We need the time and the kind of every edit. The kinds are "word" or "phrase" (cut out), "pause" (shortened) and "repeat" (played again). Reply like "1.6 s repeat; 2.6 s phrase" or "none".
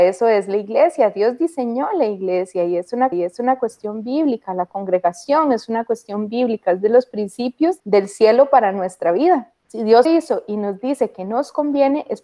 3.1 s repeat; 7.8 s pause; 9.6 s pause; 10.0 s word